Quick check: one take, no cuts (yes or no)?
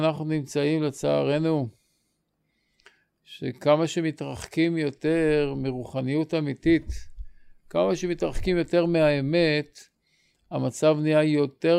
yes